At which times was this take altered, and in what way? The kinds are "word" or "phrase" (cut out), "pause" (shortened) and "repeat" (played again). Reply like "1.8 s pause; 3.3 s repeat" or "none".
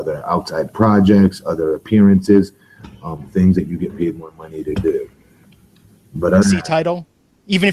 6.4 s word